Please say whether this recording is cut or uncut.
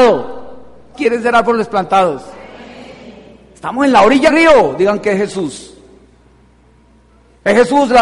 cut